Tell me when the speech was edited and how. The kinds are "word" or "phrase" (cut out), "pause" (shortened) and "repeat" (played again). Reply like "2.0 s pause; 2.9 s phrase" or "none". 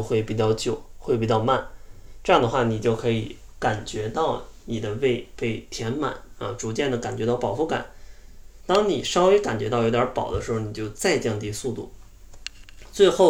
8.6 s pause